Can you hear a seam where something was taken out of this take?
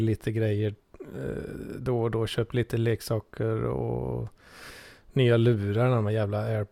no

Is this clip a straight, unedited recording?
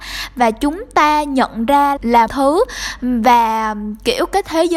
no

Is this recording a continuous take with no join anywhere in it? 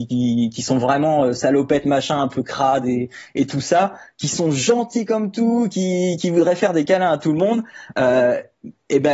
yes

